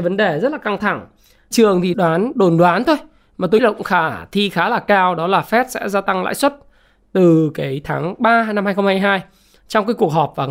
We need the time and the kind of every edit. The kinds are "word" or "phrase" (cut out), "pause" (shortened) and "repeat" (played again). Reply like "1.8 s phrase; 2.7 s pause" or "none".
1.5 s phrase; 1.9 s phrase; 3.6 s word